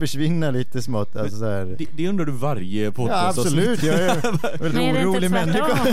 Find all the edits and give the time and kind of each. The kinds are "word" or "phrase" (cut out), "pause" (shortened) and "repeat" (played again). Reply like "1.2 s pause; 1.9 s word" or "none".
none